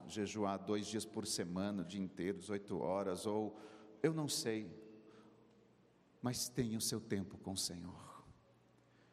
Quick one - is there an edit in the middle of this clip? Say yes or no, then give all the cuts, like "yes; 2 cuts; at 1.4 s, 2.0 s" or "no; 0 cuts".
no; 0 cuts